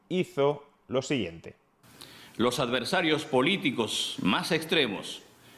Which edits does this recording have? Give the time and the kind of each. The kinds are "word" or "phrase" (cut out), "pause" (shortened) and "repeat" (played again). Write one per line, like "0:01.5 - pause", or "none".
none